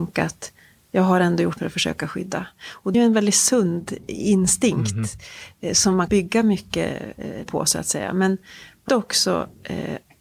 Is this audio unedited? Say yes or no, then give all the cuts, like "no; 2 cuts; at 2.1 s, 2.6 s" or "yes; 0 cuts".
no; 5 cuts; at 1.6 s, 2.9 s, 6.1 s, 7.4 s, 8.9 s